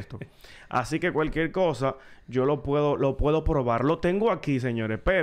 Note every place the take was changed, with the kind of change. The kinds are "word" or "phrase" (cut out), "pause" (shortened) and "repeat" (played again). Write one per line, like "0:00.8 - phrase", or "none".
none